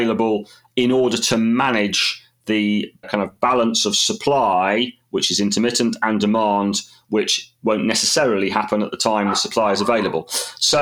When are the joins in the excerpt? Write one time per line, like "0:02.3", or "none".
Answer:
none